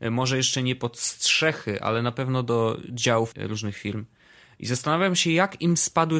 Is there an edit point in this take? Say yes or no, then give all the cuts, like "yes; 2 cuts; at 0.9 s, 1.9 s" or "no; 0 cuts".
yes; 1 cut; at 3.3 s